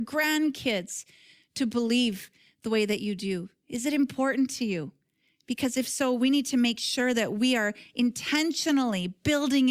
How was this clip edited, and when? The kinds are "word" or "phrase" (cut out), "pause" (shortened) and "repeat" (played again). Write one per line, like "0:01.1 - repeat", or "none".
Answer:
none